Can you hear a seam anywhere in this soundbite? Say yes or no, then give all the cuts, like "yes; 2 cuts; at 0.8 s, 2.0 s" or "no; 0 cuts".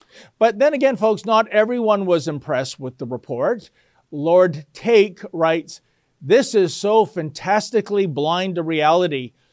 no; 0 cuts